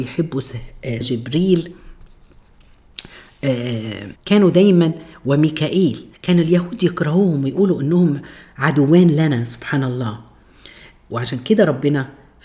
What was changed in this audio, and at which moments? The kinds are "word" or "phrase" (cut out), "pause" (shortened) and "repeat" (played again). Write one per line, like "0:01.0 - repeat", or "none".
0:01.0 - word
0:04.2 - pause
0:06.1 - pause